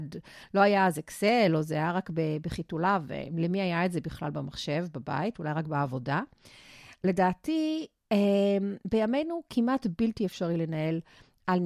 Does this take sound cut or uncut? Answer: uncut